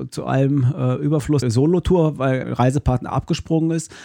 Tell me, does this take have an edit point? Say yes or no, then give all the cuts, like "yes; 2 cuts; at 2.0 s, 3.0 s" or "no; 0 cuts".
yes; 2 cuts; at 1.4 s, 2.4 s